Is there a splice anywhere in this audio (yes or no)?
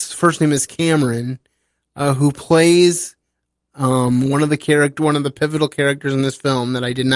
no